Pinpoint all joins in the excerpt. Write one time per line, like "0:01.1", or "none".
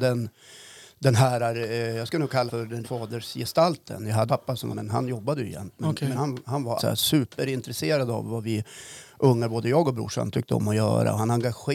0:02.5
0:02.8
0:04.3
0:04.7
0:06.1
0:06.8